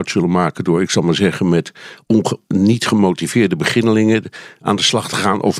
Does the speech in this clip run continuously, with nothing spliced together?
yes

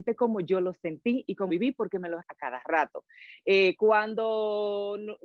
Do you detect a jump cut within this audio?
yes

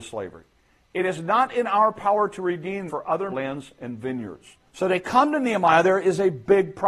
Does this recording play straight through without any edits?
no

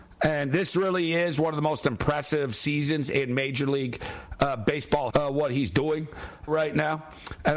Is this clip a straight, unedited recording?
no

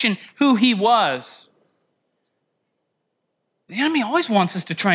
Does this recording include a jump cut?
no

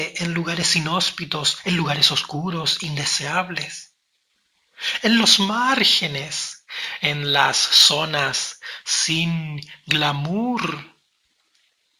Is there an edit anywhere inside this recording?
no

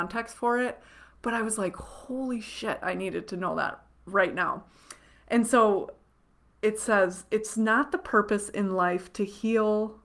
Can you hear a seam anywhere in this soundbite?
no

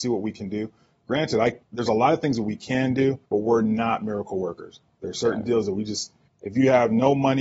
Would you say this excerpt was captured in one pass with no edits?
no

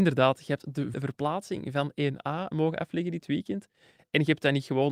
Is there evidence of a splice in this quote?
yes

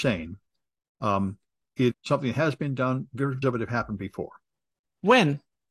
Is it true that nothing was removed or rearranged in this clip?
no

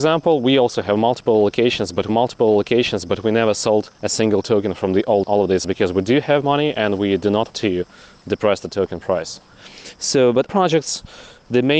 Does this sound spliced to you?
yes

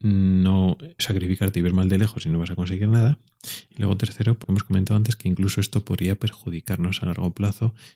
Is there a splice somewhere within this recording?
yes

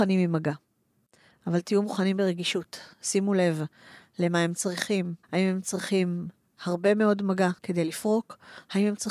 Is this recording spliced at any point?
yes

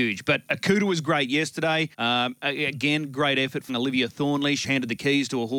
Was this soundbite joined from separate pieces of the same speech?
yes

